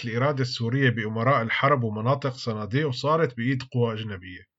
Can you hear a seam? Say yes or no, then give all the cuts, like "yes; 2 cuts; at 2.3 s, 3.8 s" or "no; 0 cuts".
no; 0 cuts